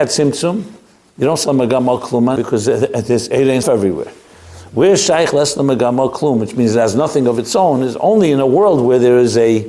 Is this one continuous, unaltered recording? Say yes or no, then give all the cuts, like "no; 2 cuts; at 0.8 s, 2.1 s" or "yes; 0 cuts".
no; 3 cuts; at 1.4 s, 2.4 s, 3.6 s